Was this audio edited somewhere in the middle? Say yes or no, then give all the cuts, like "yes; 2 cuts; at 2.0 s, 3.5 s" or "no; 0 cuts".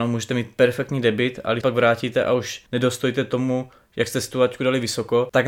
yes; 2 cuts; at 1.6 s, 2.7 s